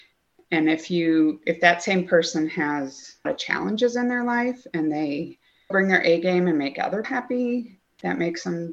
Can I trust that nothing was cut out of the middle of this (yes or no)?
no